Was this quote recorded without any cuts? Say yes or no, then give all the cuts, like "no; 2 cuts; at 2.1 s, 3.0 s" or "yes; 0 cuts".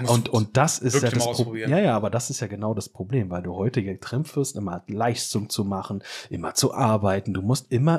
yes; 0 cuts